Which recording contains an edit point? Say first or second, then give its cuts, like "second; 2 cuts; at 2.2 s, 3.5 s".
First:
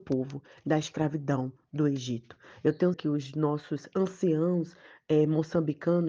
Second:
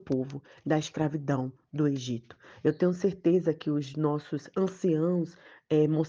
first; 1 cut; at 2.9 s